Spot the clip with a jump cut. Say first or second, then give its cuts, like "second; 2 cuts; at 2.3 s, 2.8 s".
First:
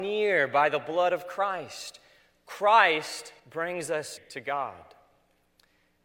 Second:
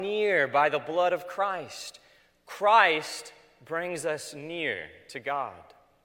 first; 2 cuts; at 3.4 s, 4.2 s